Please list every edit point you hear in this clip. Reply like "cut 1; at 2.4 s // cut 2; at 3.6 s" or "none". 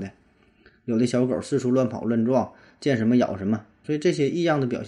cut 1; at 3.8 s